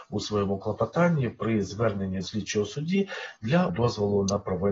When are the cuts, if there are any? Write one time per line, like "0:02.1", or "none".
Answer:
0:02.2
0:03.7